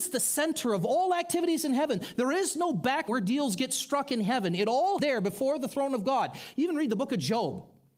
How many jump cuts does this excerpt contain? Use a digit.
2